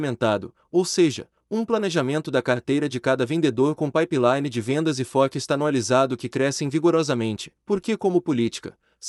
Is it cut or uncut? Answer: cut